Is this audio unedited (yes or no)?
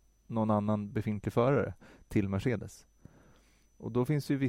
yes